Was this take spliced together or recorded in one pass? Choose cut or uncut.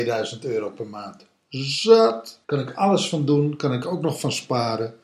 cut